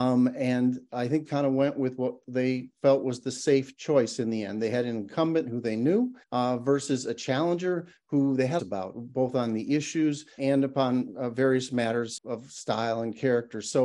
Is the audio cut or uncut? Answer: cut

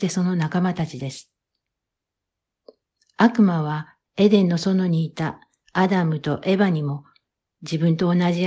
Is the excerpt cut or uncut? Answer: uncut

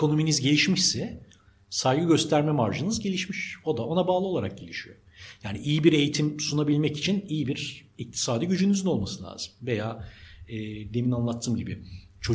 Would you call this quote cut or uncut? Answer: uncut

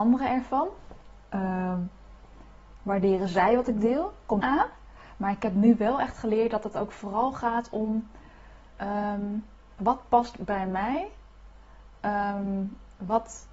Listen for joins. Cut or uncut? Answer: cut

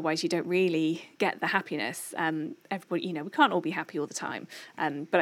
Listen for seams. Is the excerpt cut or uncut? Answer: cut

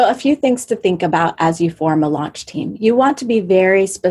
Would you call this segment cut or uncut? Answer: uncut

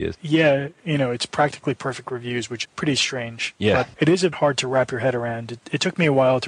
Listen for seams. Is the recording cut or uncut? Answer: cut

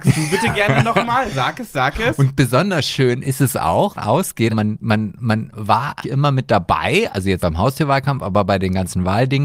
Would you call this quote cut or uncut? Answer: cut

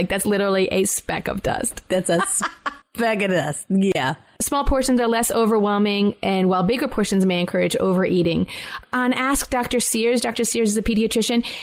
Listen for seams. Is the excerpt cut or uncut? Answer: uncut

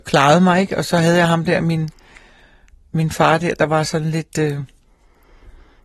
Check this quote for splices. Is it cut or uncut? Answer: uncut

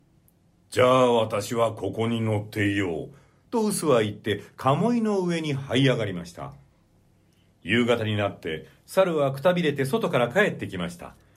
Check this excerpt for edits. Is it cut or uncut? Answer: cut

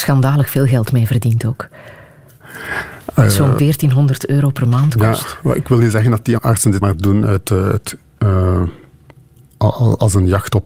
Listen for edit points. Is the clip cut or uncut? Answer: cut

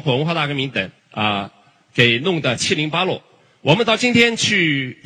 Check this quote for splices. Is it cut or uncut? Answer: cut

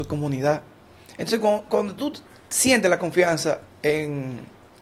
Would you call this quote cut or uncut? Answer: uncut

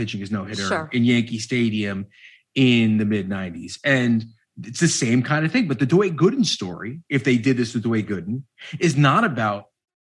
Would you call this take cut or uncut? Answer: uncut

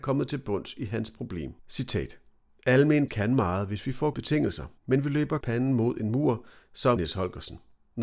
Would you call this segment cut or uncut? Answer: cut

